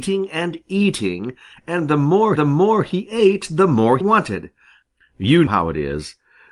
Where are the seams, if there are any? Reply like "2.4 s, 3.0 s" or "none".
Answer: 2.4 s, 4.0 s, 5.5 s